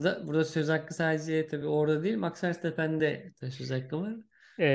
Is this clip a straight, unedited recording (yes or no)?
yes